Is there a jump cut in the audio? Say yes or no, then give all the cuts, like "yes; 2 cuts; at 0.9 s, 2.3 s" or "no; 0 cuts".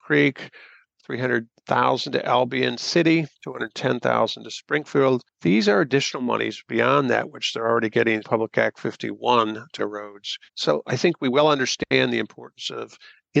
yes; 3 cuts; at 8.2 s, 9.8 s, 10.5 s